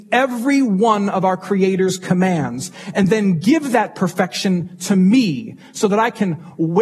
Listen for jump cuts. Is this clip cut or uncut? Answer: uncut